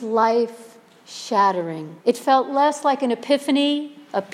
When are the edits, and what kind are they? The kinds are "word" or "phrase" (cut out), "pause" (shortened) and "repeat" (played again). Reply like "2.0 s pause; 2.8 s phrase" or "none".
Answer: 2.0 s pause